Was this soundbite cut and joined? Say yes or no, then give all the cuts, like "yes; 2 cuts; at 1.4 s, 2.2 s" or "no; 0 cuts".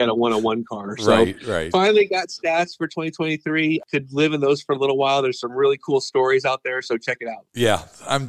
no; 0 cuts